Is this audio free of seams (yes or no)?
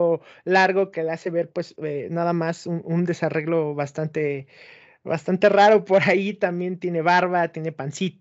yes